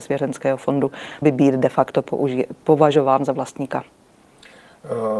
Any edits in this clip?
yes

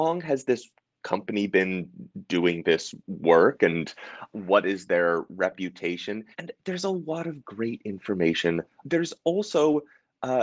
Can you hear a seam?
yes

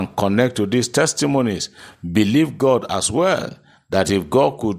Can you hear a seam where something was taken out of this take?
no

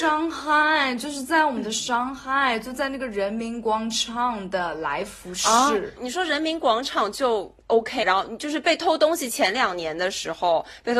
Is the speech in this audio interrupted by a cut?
yes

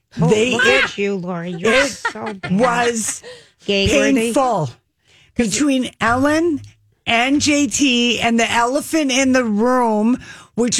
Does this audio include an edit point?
no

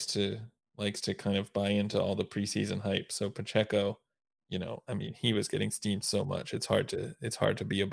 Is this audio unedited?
yes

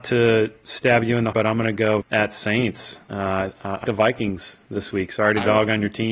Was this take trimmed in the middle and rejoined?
yes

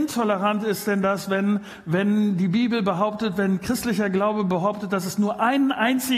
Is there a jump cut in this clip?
no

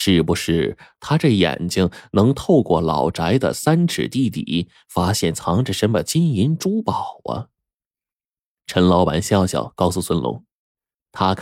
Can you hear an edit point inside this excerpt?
no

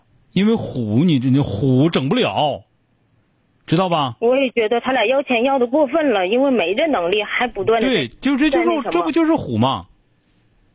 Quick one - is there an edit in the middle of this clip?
no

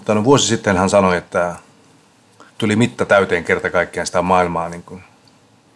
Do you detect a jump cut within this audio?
yes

